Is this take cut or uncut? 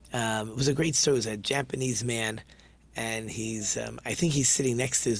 uncut